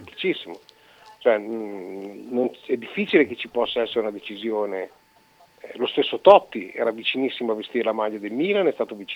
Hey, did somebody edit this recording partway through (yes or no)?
no